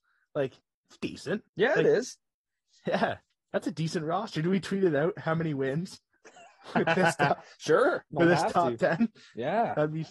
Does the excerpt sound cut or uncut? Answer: cut